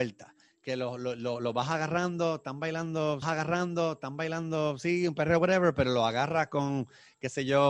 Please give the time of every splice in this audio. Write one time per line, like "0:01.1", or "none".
0:03.2